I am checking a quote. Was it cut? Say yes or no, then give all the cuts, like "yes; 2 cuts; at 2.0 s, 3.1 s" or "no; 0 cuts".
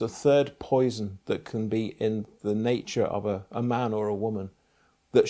no; 0 cuts